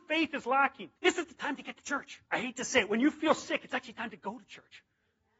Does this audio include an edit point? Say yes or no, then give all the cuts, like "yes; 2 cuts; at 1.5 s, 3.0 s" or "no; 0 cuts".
yes; 2 cuts; at 1.0 s, 2.3 s